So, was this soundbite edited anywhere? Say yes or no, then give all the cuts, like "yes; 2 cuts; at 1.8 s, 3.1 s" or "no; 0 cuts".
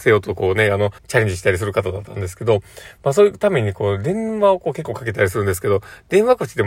yes; 1 cut; at 1.0 s